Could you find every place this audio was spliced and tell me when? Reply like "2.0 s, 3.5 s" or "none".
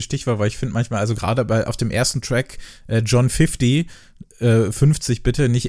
none